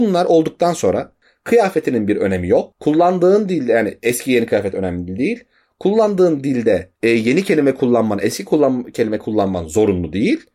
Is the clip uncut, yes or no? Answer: yes